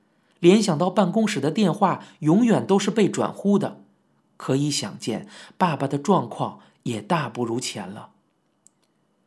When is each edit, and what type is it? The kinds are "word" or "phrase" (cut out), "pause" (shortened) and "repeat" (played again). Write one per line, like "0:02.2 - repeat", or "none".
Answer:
none